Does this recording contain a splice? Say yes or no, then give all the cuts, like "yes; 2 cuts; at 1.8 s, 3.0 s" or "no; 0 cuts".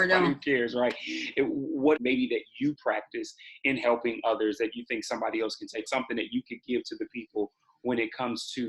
yes; 2 cuts; at 2.0 s, 5.9 s